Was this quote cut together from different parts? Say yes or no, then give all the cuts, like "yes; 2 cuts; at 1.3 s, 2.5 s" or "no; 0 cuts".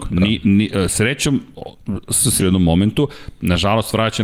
yes; 1 cut; at 2.4 s